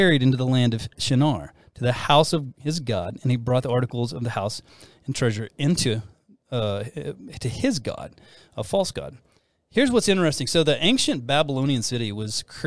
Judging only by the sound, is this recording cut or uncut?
uncut